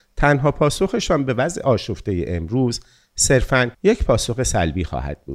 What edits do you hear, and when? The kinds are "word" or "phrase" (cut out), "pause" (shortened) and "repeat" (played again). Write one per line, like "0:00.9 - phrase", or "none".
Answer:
0:03.7 - pause